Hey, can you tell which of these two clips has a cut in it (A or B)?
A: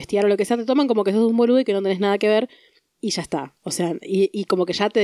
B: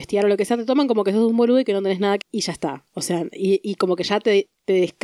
B